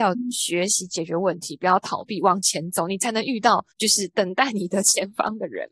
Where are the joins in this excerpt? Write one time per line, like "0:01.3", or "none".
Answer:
0:03.7